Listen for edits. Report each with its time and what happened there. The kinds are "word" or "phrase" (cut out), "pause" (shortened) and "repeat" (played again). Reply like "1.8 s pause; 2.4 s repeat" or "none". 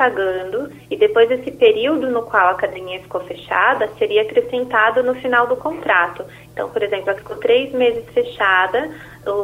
7.2 s word